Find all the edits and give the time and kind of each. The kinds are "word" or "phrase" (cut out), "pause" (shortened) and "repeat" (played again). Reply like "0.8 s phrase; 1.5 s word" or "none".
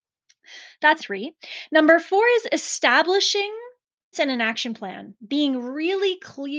1.0 s word; 4.1 s word